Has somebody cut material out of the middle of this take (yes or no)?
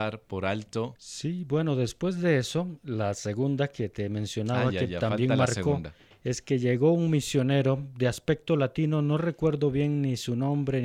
no